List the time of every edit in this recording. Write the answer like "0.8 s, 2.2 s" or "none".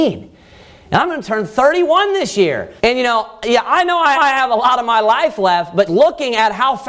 2.8 s, 4.1 s, 5.9 s